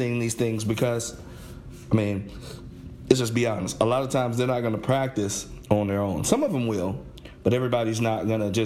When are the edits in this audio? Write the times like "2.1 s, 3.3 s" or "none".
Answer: none